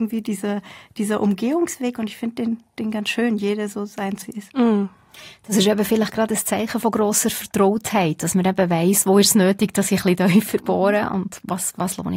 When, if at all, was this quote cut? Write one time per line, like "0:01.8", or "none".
0:04.2